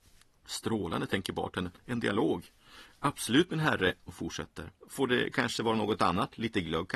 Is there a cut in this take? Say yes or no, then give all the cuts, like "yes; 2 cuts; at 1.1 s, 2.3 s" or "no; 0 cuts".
yes; 2 cuts; at 4.1 s, 4.8 s